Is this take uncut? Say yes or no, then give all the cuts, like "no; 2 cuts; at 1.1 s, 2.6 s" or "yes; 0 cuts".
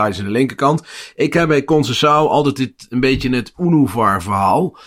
yes; 0 cuts